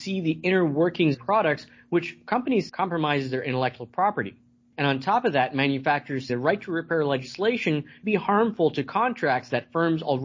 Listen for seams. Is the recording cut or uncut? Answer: cut